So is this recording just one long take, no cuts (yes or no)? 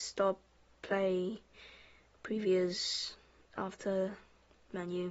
yes